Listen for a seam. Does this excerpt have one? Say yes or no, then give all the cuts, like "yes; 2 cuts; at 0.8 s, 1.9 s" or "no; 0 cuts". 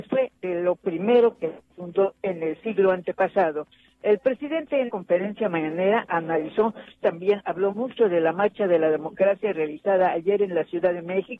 yes; 3 cuts; at 4.9 s, 7.0 s, 7.7 s